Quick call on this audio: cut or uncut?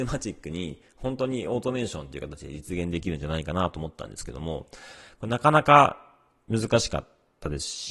uncut